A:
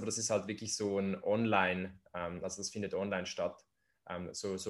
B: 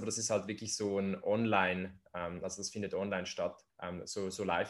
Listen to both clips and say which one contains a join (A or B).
B